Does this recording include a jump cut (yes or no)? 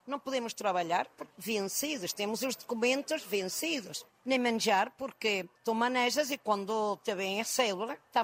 yes